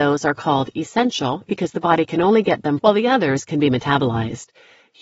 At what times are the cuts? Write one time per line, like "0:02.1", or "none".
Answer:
0:02.8